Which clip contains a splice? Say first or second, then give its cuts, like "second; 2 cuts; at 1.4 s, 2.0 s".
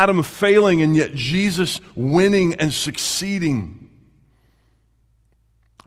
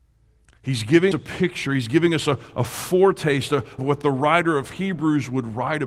second; 2 cuts; at 1.1 s, 3.8 s